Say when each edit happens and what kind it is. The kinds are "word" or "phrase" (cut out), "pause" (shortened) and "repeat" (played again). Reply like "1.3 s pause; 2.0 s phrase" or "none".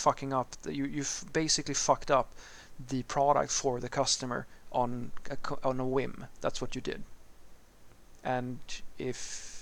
none